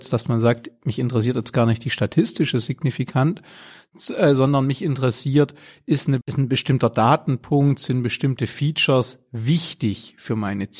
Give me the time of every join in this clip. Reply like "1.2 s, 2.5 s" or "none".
6.2 s